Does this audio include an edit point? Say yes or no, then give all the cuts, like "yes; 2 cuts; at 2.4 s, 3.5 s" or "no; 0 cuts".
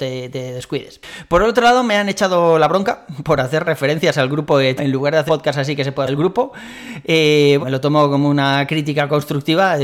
yes; 5 cuts; at 3.7 s, 4.8 s, 5.3 s, 6.1 s, 7.6 s